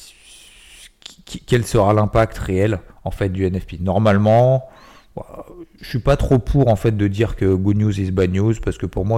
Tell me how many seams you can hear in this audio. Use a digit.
2